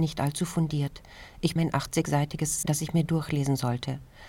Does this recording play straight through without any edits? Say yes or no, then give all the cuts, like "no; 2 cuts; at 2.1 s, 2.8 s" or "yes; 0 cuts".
no; 2 cuts; at 1.6 s, 2.6 s